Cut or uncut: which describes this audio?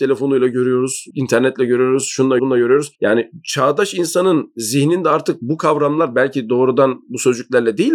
cut